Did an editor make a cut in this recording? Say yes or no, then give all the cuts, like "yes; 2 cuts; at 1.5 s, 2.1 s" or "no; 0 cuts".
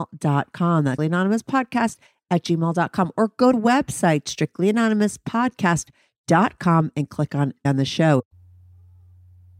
yes; 3 cuts; at 1.0 s, 3.5 s, 7.6 s